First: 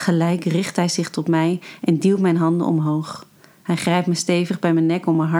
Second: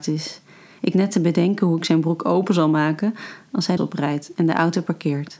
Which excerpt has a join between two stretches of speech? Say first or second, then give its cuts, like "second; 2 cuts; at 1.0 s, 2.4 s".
second; 2 cuts; at 0.9 s, 3.8 s